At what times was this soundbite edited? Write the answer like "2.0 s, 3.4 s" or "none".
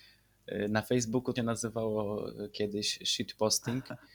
1.4 s